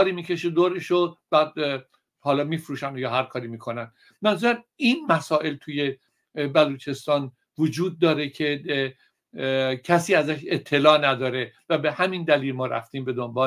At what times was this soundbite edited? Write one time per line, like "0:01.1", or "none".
none